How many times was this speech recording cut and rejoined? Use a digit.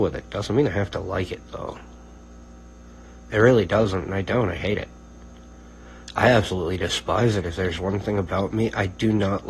0